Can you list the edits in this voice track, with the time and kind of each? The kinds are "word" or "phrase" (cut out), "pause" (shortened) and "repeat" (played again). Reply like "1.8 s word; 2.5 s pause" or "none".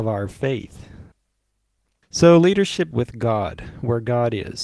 2.9 s word